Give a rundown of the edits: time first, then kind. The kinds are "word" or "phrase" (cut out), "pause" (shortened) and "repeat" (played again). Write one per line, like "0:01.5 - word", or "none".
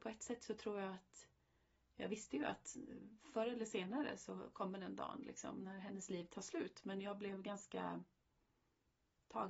none